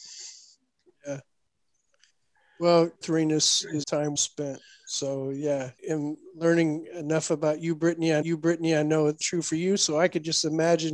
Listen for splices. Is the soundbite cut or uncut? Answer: cut